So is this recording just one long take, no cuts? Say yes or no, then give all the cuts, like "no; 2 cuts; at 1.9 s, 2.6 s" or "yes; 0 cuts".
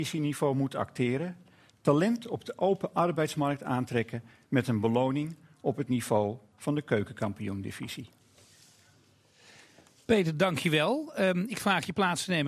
yes; 0 cuts